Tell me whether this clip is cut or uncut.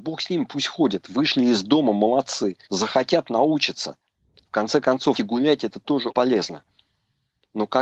cut